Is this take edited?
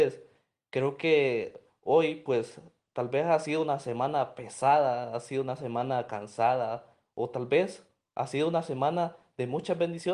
no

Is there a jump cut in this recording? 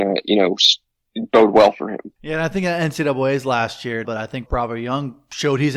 yes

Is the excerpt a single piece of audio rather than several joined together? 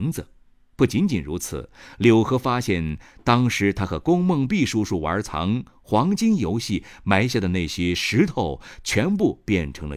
yes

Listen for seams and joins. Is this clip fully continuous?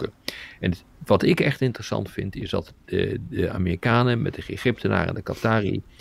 yes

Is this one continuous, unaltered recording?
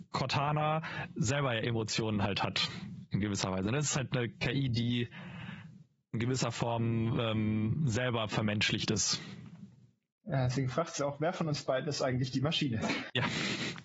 yes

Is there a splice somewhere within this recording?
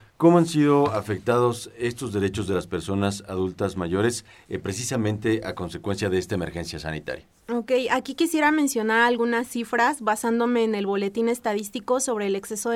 no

